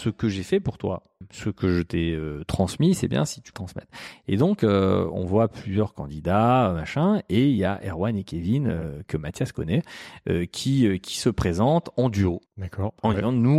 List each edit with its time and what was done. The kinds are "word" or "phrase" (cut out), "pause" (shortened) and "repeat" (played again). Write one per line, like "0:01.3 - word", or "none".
0:03.5 - phrase
0:12.5 - pause